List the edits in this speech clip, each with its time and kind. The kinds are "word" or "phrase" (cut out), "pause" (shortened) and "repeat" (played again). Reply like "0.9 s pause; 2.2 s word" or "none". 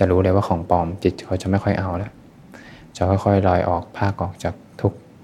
none